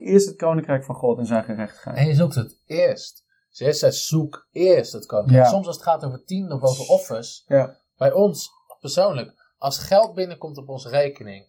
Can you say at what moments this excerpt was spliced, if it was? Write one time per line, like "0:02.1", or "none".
none